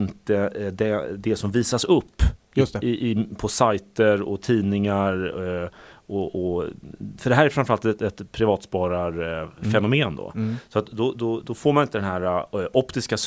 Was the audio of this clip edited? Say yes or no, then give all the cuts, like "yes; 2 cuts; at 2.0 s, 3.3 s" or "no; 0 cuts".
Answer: no; 0 cuts